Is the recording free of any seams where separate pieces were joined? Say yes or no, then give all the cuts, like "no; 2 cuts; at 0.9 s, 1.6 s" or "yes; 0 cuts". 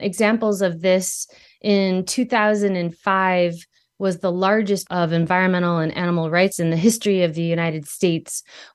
no; 2 cuts; at 4.9 s, 6.5 s